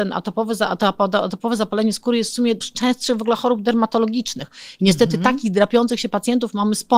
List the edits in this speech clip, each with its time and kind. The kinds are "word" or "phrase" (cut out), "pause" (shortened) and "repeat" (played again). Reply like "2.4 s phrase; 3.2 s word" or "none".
2.6 s word